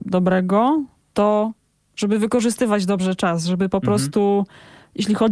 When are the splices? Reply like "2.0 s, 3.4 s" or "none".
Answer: none